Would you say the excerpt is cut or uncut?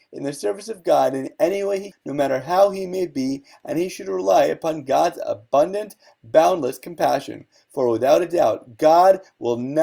cut